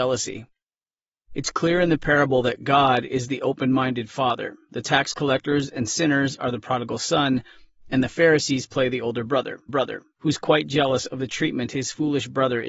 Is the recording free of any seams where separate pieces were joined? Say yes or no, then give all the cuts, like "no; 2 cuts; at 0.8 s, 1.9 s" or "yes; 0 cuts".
no; 1 cut; at 9.7 s